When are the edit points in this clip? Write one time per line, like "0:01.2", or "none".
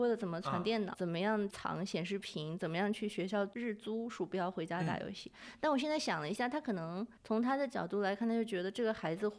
0:00.9
0:07.2